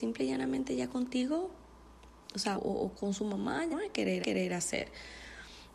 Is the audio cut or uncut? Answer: cut